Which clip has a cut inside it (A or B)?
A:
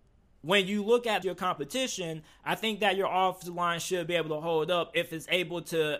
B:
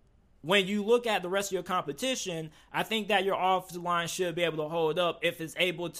A